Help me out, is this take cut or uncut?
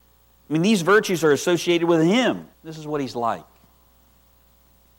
cut